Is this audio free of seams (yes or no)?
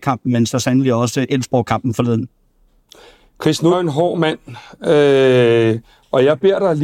no